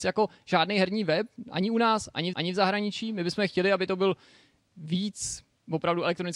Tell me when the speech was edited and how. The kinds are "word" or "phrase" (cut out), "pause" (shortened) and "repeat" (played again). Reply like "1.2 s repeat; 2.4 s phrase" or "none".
2.3 s repeat